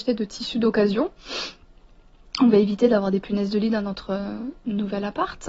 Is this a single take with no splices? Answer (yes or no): yes